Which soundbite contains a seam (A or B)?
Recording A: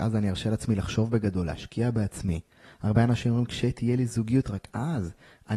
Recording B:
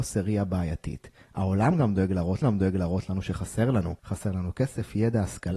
B